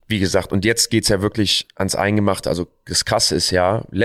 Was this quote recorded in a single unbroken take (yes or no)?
yes